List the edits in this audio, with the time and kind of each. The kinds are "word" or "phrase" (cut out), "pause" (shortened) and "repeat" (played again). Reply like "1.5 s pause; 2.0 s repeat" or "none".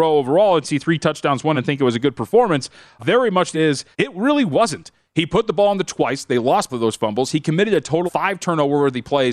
1.5 s word; 3.0 s word; 3.5 s word; 3.9 s pause; 5.9 s word; 6.7 s word; 8.1 s word